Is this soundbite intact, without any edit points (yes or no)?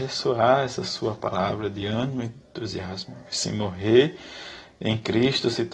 yes